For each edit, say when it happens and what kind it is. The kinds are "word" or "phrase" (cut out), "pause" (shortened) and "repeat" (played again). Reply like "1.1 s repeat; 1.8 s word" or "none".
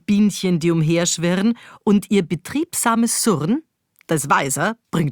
none